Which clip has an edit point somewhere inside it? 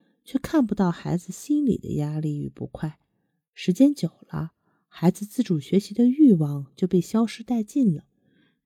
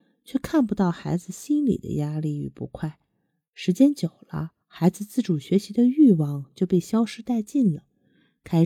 second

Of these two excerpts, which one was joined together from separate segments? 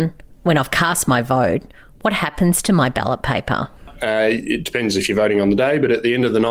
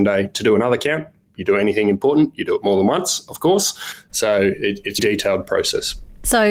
second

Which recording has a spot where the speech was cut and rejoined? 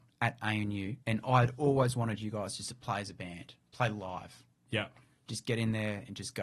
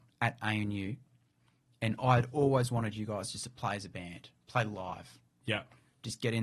first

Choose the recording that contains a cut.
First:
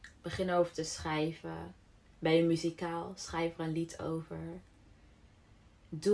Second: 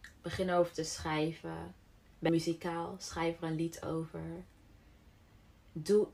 second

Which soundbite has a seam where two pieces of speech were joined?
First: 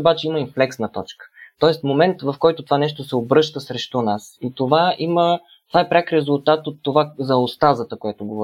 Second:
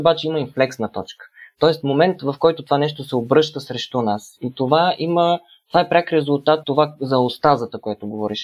second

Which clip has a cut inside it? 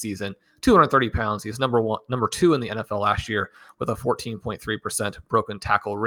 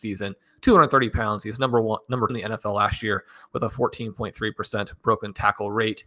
second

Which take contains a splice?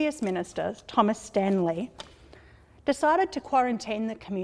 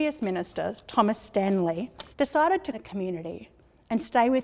second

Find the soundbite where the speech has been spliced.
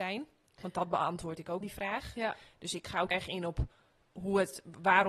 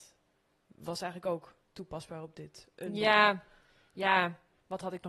first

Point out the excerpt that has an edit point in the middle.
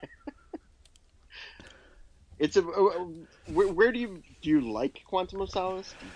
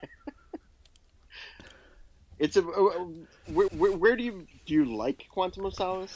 second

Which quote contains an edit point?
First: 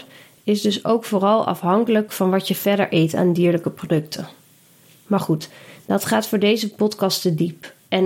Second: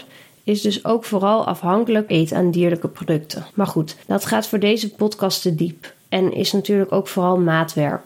second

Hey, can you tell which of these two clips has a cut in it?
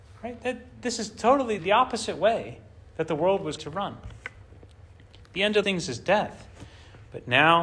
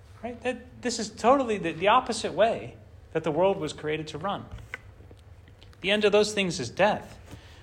first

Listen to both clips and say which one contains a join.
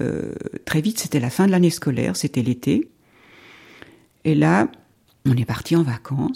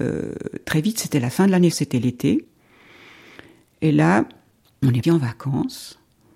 second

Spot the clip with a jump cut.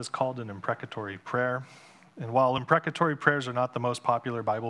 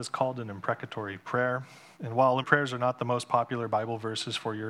second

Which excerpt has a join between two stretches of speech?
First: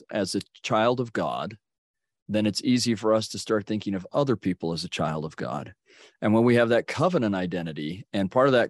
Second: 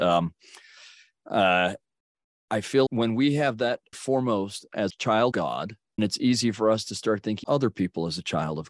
second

